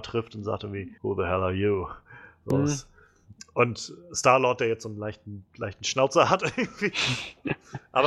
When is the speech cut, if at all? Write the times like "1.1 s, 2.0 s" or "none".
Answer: 1.0 s, 5.5 s